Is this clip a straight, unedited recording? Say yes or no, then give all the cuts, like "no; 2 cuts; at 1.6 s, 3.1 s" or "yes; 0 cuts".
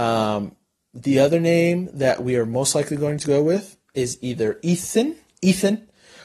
yes; 0 cuts